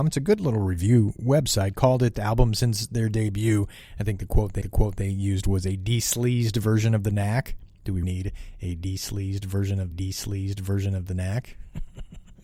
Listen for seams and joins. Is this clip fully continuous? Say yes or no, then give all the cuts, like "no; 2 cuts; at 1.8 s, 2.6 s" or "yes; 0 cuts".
no; 4 cuts; at 2.1 s, 4.6 s, 8.0 s, 9.9 s